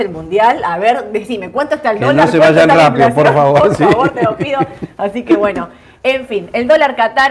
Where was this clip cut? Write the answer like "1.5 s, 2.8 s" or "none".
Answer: none